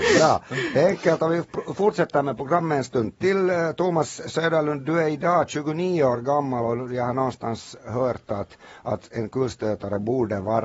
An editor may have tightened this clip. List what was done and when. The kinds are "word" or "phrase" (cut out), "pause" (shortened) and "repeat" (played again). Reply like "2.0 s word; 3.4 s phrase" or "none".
none